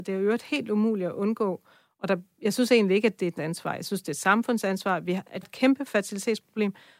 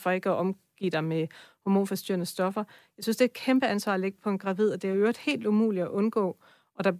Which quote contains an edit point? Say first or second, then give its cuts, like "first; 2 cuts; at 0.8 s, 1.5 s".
first; 2 cuts; at 3.4 s, 5.4 s